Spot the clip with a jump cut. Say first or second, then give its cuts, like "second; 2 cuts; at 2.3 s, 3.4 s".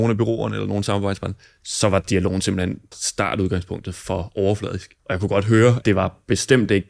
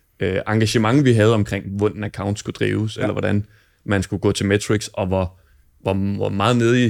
first; 3 cuts; at 2.9 s, 5.0 s, 5.8 s